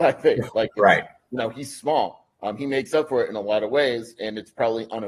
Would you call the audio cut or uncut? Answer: uncut